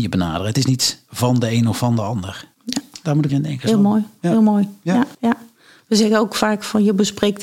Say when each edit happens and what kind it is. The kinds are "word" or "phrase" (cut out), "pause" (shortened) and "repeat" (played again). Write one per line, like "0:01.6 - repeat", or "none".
0:02.5 - pause
0:03.3 - word
0:05.1 - pause